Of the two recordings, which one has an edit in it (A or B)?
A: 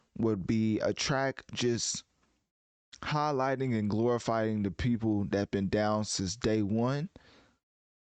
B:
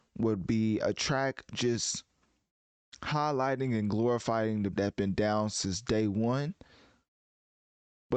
B